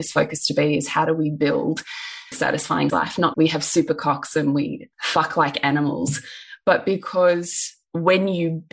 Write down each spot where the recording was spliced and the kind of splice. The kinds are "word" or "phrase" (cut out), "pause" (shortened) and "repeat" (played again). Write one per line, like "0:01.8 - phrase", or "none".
0:02.3 - phrase
0:02.9 - word
0:03.3 - phrase
0:04.9 - pause